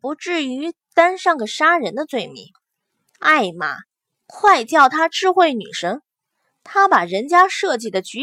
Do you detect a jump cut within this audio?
no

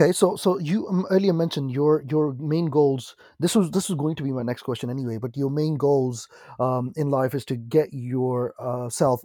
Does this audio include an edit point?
no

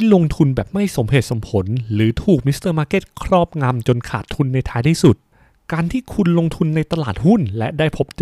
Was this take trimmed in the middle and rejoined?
no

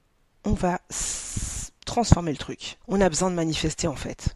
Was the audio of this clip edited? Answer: yes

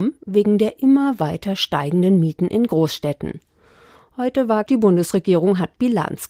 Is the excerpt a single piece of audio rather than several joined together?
no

